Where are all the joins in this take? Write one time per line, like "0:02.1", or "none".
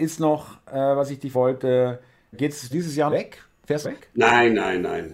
0:01.3
0:02.3
0:02.7
0:03.1
0:03.8